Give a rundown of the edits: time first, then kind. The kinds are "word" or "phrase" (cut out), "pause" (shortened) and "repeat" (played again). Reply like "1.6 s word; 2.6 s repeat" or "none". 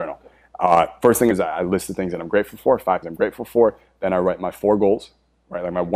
1.3 s phrase; 3.0 s word